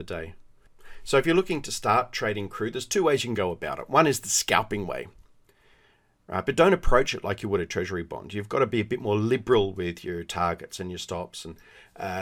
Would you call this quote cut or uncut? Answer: uncut